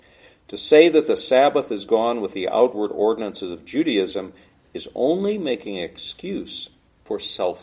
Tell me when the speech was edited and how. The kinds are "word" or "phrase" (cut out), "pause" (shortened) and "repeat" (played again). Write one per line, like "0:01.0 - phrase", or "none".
none